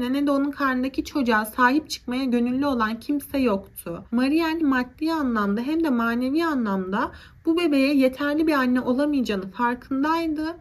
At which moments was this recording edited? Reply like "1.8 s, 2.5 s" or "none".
4.6 s